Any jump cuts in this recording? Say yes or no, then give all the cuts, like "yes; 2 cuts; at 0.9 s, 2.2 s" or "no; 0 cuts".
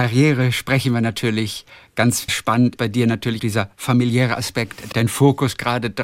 yes; 4 cuts; at 2.3 s, 2.8 s, 3.4 s, 4.9 s